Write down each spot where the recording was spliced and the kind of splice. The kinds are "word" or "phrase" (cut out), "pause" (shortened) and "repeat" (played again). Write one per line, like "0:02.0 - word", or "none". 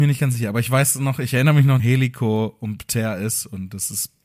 0:01.8 - phrase